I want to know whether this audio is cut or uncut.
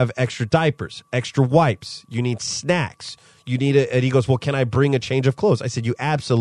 uncut